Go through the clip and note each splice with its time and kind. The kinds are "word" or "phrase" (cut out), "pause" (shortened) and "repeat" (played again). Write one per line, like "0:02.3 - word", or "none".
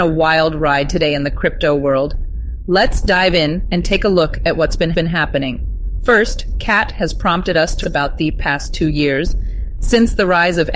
0:04.9 - repeat
0:07.8 - word